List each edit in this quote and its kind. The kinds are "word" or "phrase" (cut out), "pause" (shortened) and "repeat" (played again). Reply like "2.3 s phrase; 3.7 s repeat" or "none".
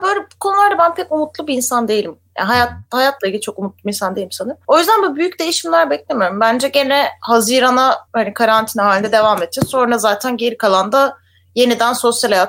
8.1 s word